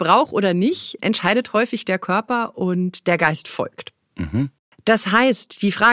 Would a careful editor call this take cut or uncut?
uncut